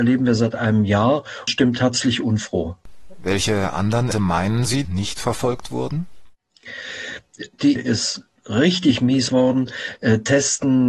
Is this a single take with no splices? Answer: no; 6 cuts; at 1.5 s, 4.1 s, 4.8 s, 7.8 s, 8.3 s, 9.3 s

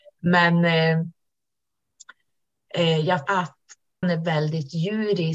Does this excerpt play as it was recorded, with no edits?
no; 2 cuts; at 3.3 s, 4.0 s

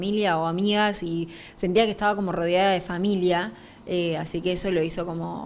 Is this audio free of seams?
yes; 0 cuts

